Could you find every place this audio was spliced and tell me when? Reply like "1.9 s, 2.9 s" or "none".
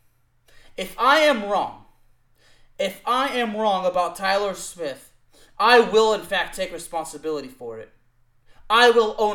none